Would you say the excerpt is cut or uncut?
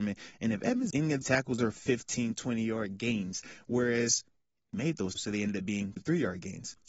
cut